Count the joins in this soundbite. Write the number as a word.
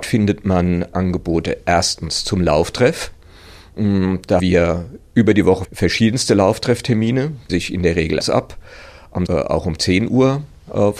six